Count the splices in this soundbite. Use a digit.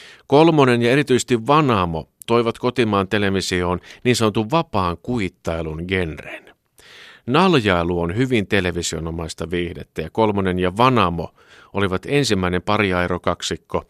0